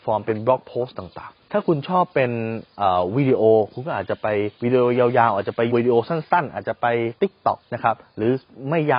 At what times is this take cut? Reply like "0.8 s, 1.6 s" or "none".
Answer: 1.4 s, 4.5 s, 5.7 s, 7.6 s

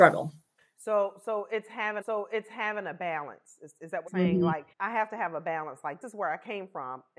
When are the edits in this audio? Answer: 2.0 s, 4.1 s, 4.7 s, 6.0 s

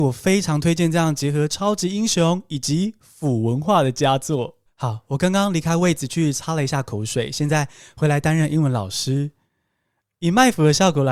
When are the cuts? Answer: 4.7 s

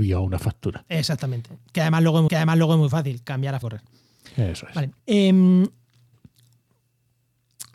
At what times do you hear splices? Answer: 2.3 s, 3.6 s, 5.0 s

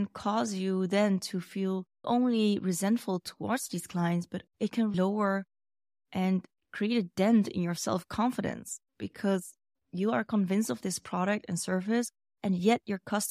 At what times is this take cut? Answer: 2.0 s, 4.5 s, 4.9 s

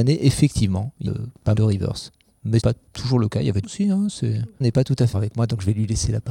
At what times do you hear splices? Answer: 1.1 s, 1.6 s, 2.6 s, 3.6 s, 4.6 s, 5.1 s

